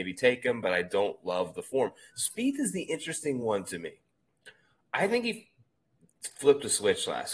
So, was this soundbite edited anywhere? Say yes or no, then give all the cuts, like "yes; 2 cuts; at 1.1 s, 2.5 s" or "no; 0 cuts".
no; 0 cuts